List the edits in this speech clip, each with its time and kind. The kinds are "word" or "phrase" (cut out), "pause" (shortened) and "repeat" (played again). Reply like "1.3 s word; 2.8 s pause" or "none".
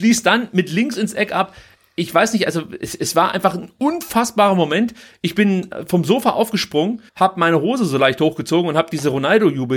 7.1 s pause